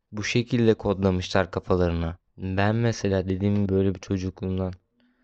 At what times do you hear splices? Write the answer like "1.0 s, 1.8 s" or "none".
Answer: 2.3 s, 3.7 s